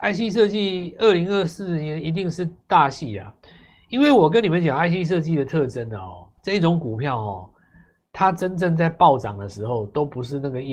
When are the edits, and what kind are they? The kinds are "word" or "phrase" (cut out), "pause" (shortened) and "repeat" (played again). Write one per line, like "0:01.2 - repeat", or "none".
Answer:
0:06.4 - pause